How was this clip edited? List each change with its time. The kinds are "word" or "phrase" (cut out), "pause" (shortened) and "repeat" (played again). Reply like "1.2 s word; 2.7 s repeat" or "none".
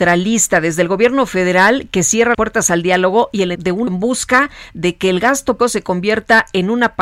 2.3 s word; 3.6 s word; 3.9 s word; 5.6 s word